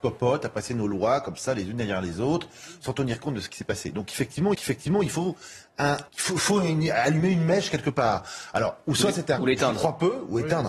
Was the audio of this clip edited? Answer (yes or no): yes